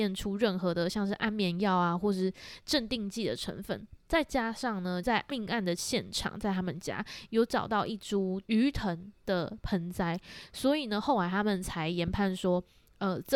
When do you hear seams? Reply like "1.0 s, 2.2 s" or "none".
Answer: 5.0 s, 8.4 s, 9.2 s